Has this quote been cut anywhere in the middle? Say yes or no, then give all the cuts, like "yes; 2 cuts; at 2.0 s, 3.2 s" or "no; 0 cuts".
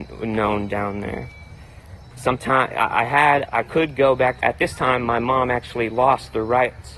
yes; 3 cuts; at 2.1 s, 3.5 s, 4.4 s